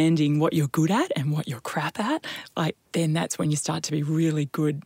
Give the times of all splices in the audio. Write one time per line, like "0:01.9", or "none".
0:02.9